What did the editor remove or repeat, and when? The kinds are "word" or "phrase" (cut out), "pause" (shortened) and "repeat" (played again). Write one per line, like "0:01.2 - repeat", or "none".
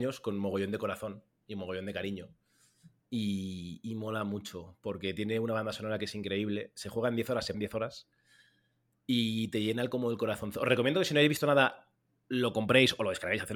0:07.5 - word